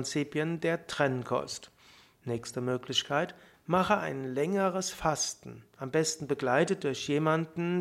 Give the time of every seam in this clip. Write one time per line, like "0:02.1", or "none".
none